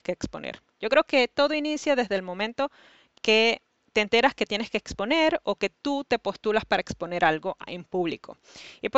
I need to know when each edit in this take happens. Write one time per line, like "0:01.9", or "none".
none